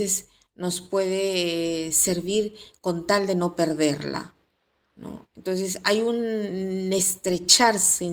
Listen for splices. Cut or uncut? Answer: uncut